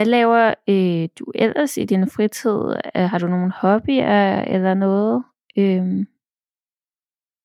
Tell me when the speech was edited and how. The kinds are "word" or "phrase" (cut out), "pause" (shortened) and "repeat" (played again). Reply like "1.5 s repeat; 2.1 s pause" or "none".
none